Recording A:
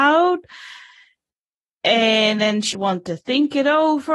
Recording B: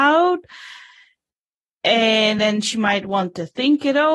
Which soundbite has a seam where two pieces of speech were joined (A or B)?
A